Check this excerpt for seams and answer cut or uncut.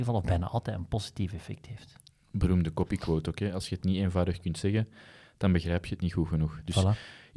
uncut